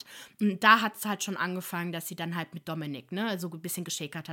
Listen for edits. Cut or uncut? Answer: uncut